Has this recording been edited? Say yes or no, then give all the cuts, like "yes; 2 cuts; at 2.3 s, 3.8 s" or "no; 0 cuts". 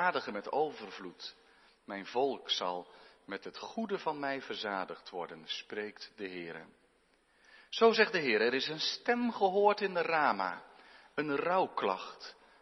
no; 0 cuts